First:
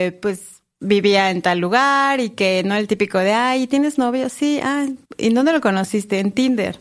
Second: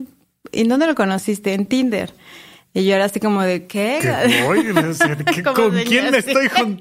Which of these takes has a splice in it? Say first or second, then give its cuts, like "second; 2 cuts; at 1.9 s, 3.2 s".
first; 1 cut; at 5.0 s